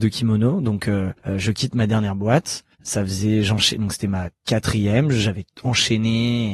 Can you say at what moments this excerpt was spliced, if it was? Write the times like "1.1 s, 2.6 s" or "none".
1.2 s, 2.7 s